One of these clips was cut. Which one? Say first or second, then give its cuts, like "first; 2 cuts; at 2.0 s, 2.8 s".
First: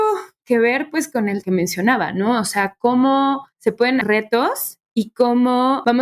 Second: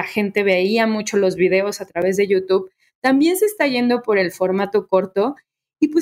first; 3 cuts; at 1.4 s, 3.5 s, 4.0 s